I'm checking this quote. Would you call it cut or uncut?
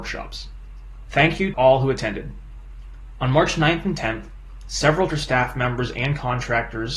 cut